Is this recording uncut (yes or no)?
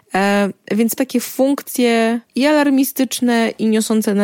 no